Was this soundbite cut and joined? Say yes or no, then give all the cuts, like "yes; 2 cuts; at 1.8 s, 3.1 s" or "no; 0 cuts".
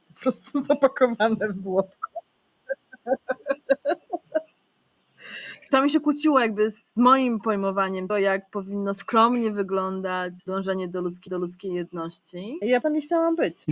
yes; 4 cuts; at 8.1 s, 10.4 s, 11.3 s, 12.8 s